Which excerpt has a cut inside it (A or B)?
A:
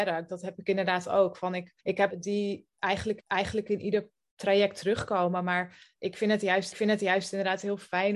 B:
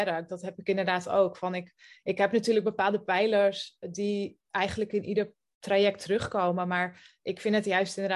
A